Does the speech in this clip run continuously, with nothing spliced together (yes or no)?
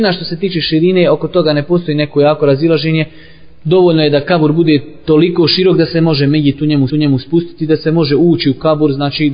no